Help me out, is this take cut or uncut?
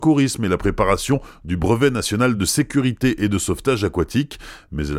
uncut